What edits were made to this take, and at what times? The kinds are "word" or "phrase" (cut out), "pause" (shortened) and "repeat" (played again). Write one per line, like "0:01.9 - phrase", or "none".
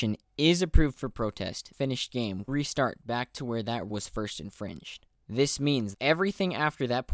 0:01.7 - word
0:02.5 - word
0:03.9 - word
0:05.9 - word